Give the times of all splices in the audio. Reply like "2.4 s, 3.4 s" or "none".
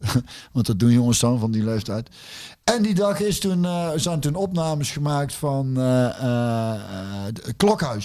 none